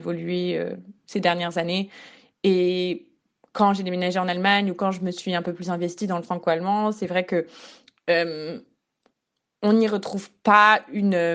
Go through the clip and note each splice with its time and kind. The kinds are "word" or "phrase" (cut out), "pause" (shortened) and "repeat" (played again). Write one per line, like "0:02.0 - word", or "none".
none